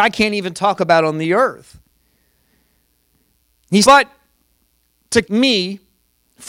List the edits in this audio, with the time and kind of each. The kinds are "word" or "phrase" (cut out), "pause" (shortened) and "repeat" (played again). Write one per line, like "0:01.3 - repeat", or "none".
0:03.8 - word
0:05.2 - word